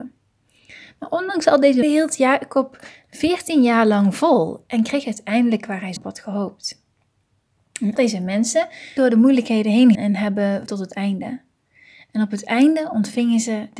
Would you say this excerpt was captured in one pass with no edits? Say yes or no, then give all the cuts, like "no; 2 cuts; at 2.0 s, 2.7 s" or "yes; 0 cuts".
no; 6 cuts; at 1.8 s, 6.0 s, 8.0 s, 9.0 s, 9.9 s, 10.7 s